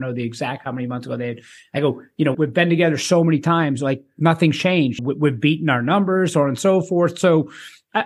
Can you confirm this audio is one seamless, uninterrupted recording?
no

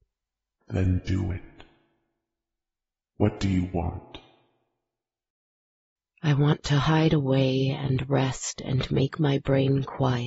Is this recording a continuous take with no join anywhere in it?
yes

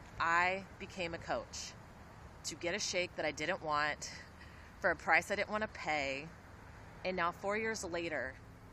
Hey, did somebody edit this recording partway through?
no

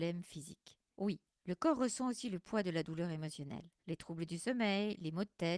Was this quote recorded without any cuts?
no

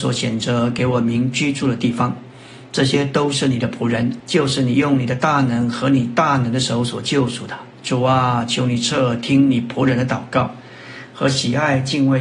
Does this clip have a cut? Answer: yes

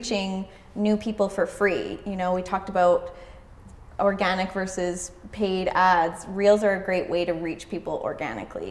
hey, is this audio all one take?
yes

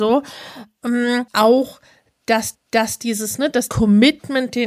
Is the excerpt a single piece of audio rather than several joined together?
no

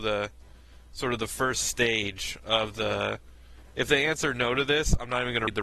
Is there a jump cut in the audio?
no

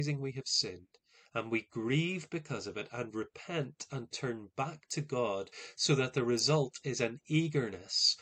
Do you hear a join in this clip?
no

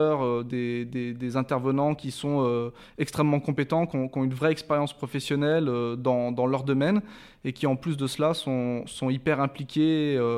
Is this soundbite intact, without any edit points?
yes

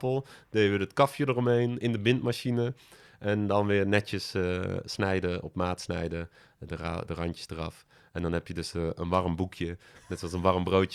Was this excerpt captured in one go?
yes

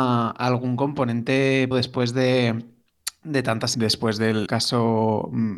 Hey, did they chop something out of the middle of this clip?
yes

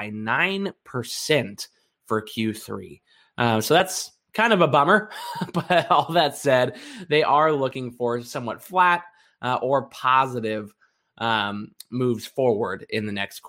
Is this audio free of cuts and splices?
yes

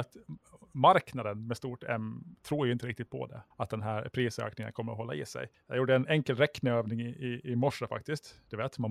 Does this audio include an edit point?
yes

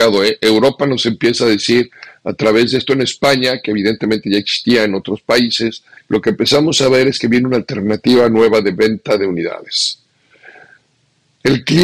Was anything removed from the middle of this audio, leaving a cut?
yes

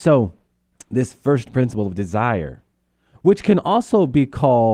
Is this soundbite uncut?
yes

